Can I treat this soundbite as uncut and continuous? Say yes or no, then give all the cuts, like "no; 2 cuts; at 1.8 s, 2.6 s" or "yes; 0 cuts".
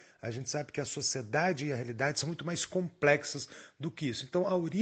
yes; 0 cuts